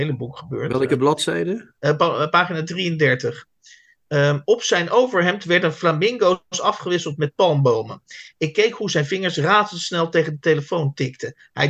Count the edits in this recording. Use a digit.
1